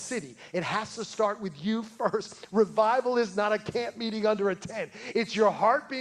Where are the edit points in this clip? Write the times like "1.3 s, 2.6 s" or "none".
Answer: none